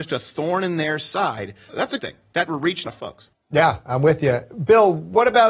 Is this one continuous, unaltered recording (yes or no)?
no